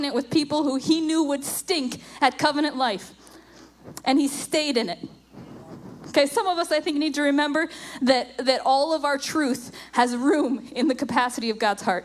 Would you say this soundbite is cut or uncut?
uncut